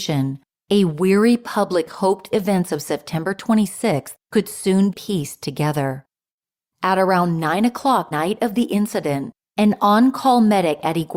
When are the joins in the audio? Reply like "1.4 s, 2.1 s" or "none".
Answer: 2.3 s, 4.9 s, 8.1 s